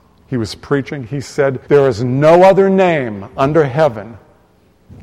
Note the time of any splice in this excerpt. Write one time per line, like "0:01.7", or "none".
0:01.6